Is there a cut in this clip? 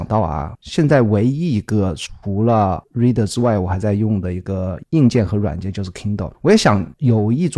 no; 0 cuts

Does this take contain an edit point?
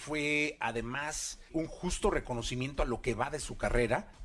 yes; 1 cut; at 1.5 s

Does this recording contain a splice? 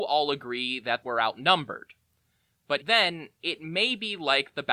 yes; 2 cuts; at 1.0 s, 2.8 s

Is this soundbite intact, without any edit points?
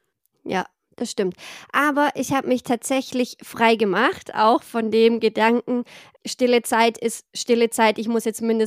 yes; 0 cuts

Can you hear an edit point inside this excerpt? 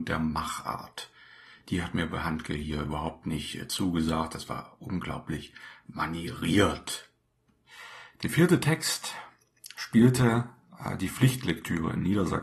no; 0 cuts

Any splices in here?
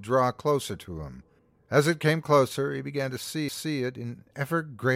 yes; 2 cuts; at 1.4 s, 3.5 s

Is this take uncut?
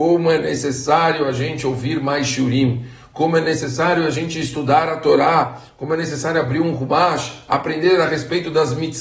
yes; 0 cuts

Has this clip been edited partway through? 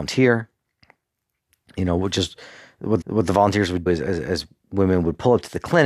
yes; 2 cuts; at 3.0 s, 3.9 s

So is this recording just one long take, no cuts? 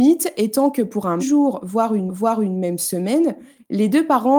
no; 2 cuts; at 1.2 s, 2.1 s

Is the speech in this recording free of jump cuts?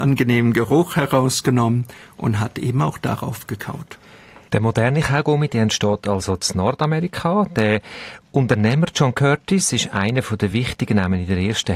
yes; 0 cuts

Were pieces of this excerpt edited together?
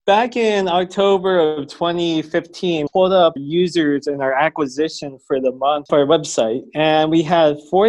yes; 3 cuts; at 2.9 s, 3.4 s, 5.9 s

